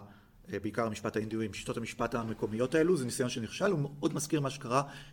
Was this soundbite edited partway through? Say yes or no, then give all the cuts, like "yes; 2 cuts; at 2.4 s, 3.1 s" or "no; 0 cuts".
no; 0 cuts